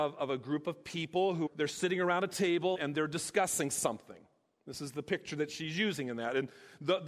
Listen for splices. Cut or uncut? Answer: cut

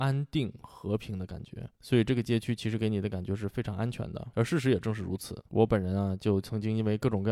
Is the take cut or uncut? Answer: cut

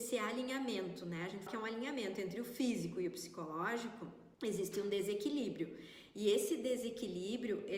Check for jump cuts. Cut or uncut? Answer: cut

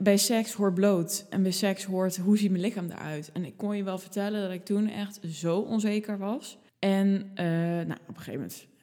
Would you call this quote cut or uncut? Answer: cut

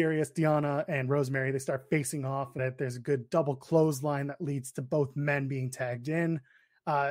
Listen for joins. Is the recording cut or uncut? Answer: cut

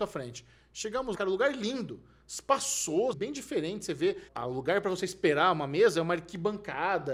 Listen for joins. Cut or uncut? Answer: cut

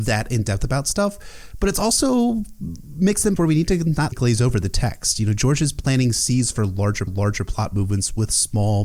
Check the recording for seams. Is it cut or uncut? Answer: cut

